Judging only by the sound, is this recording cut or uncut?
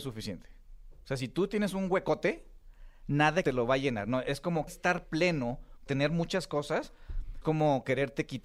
cut